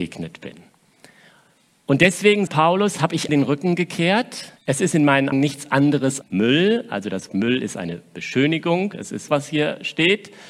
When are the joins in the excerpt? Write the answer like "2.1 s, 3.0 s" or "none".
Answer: 2.5 s, 3.3 s, 4.6 s, 5.3 s, 6.2 s, 7.3 s, 9.3 s